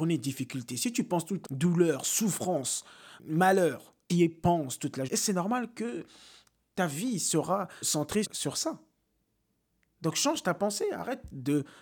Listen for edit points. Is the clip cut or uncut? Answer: cut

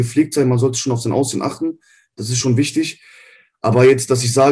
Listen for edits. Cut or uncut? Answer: uncut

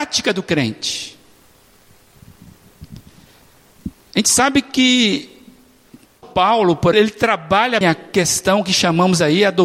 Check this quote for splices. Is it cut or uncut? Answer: cut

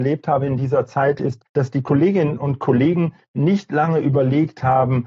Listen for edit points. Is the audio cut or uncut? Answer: cut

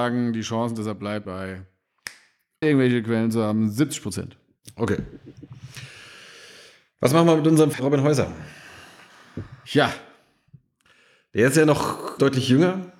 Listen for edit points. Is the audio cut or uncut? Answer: cut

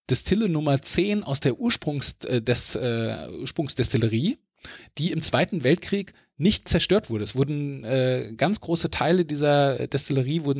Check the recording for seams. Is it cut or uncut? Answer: uncut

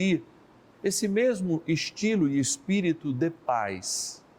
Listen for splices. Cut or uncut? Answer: uncut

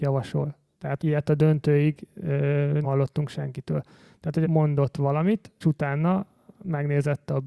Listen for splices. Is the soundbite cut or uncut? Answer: cut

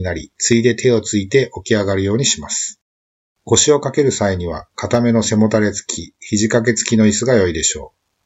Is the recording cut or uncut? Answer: uncut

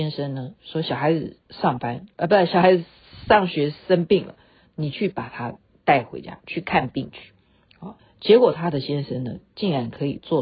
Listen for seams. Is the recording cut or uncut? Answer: cut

